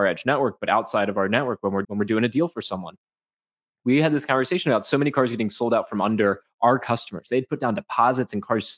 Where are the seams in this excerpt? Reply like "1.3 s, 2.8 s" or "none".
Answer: 1.8 s

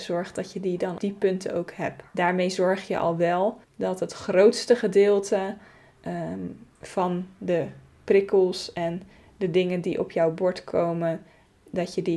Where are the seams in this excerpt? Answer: 1.0 s, 2.1 s, 3.6 s, 6.8 s

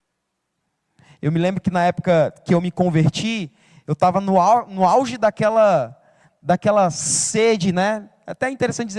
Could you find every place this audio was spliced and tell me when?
none

